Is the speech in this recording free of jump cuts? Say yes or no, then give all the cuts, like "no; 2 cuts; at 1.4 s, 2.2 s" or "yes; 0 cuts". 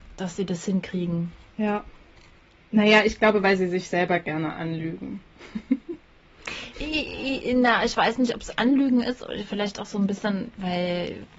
yes; 0 cuts